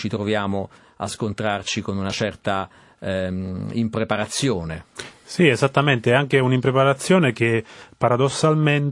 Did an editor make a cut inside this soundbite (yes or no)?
no